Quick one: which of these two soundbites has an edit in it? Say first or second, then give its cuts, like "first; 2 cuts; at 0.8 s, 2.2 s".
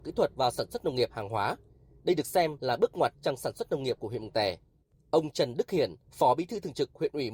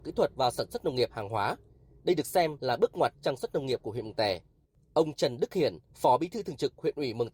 second; 1 cut; at 3.4 s